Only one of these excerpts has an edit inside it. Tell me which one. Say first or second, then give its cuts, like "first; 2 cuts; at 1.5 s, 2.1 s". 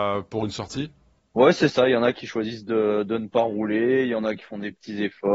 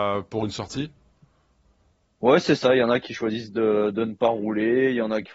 first; 1 cut; at 1.2 s